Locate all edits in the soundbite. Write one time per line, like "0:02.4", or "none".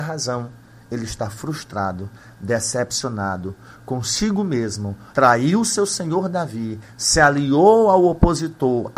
0:05.1